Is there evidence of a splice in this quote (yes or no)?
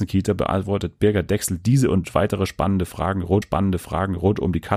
yes